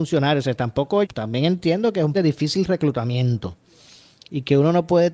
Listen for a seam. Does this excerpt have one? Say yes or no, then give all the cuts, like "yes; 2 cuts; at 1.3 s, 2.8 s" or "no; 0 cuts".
yes; 2 cuts; at 1.0 s, 2.1 s